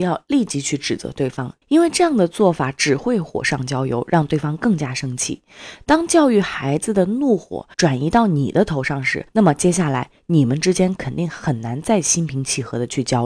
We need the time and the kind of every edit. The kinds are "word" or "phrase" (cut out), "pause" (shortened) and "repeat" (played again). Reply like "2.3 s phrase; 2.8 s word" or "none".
1.6 s pause; 7.7 s pause; 9.3 s pause